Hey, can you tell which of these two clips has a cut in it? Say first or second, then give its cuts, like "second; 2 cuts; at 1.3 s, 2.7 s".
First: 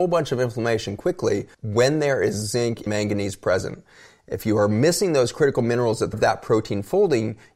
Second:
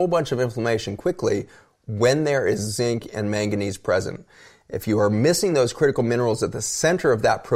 first; 3 cuts; at 1.5 s, 2.9 s, 6.1 s